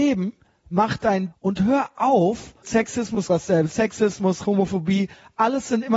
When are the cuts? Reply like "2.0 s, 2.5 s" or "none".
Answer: 1.3 s, 2.6 s, 3.3 s, 4.4 s